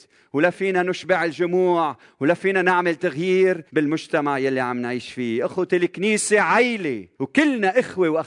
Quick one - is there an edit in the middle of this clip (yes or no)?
yes